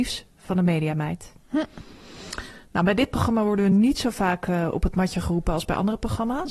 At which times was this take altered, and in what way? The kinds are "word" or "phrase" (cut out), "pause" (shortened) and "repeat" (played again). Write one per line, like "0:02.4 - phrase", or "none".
none